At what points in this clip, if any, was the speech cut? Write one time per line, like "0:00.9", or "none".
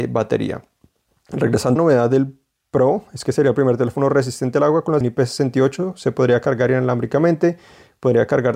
0:01.8
0:05.0